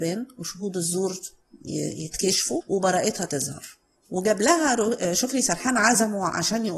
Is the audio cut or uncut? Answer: uncut